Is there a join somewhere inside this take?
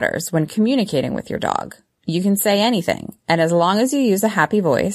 no; 0 cuts

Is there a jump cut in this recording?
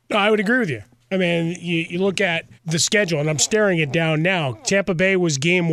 yes; 1 cut; at 2.6 s

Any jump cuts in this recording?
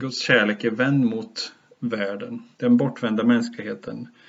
yes; 1 cut; at 2.5 s

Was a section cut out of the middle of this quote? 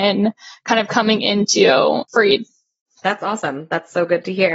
no; 0 cuts

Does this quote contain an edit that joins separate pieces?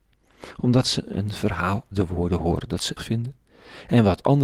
yes; 2 cuts; at 1.9 s, 3.0 s

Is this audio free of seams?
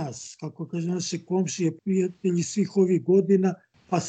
no; 1 cut; at 1.8 s

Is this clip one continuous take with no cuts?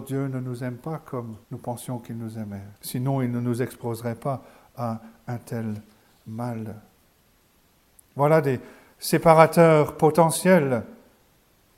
no; 2 cuts; at 1.4 s, 2.8 s

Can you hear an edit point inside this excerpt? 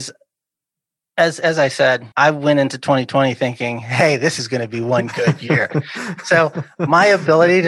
yes; 1 cut; at 2.1 s

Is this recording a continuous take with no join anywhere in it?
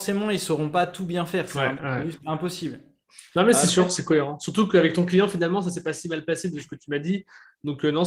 yes; 0 cuts

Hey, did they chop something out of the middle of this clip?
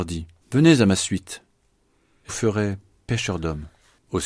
yes; 1 cut; at 2.3 s

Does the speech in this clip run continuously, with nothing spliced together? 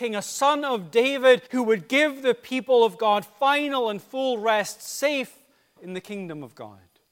no; 2 cuts; at 1.5 s, 5.8 s

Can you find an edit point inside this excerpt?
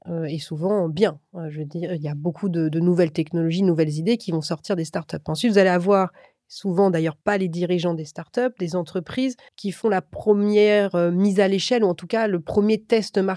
yes; 2 cuts; at 7.2 s, 9.5 s

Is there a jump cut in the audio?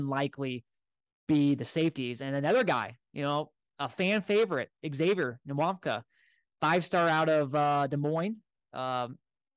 no; 0 cuts

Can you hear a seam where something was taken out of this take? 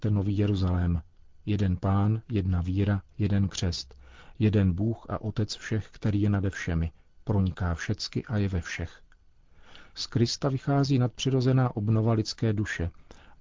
no; 0 cuts

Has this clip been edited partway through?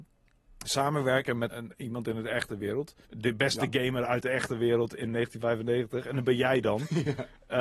yes; 2 cuts; at 1.5 s, 3.0 s

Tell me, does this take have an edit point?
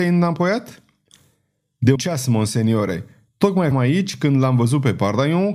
yes; 2 cuts; at 1.9 s, 3.7 s

